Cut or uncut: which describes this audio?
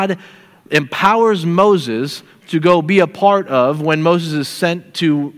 uncut